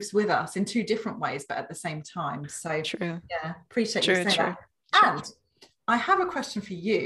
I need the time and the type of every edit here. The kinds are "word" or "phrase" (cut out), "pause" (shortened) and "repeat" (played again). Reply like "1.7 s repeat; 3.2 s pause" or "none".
none